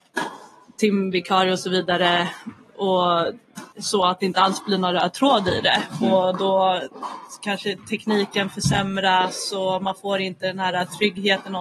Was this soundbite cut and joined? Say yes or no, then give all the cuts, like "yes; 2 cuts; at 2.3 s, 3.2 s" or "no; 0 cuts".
yes; 1 cut; at 3.7 s